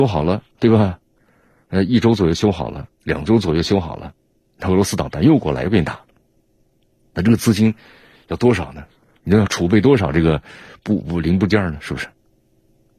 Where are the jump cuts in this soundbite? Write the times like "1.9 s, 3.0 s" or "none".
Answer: none